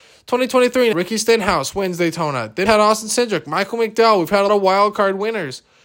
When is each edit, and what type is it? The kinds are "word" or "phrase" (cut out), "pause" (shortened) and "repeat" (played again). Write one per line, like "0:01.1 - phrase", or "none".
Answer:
0:00.9 - word
0:02.7 - word
0:04.5 - word